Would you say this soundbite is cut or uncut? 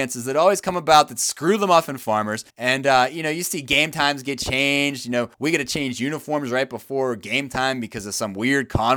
cut